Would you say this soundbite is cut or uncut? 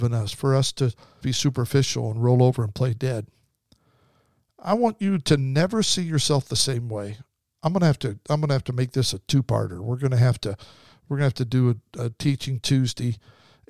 cut